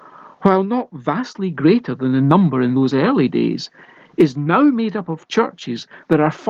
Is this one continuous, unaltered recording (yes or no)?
yes